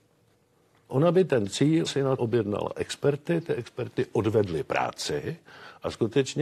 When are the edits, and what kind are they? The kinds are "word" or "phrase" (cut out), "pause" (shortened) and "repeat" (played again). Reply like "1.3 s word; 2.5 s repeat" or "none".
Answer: 1.9 s word; 2.2 s word